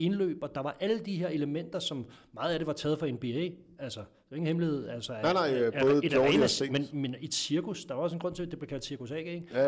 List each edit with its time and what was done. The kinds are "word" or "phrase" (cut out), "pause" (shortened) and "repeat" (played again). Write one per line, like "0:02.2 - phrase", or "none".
none